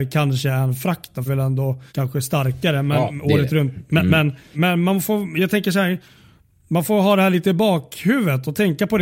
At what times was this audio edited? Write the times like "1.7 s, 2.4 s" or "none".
1.3 s, 1.9 s, 4.5 s

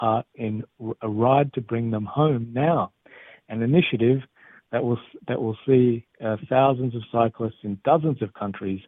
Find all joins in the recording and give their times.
none

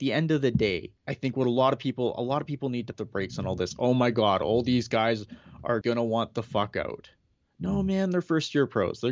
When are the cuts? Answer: 1.0 s, 2.9 s, 5.8 s

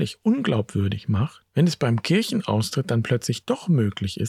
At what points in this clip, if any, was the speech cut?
1.5 s

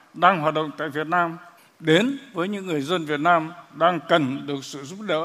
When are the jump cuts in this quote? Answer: 1.6 s

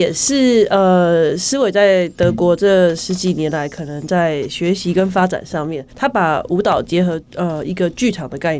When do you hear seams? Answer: 5.9 s, 7.3 s

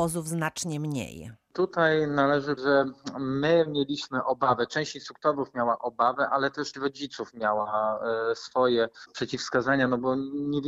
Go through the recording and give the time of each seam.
2.6 s, 6.7 s

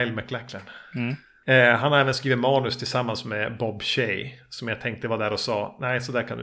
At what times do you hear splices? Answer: none

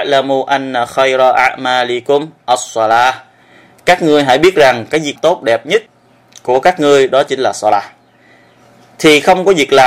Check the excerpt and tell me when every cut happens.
5.2 s

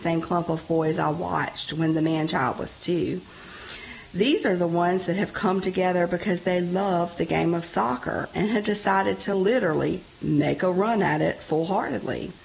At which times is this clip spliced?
none

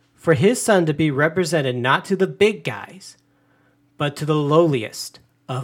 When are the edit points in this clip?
none

